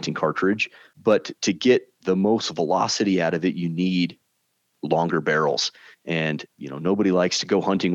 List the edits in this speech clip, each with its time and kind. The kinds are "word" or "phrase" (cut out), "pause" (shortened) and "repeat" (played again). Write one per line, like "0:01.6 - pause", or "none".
0:06.5 - pause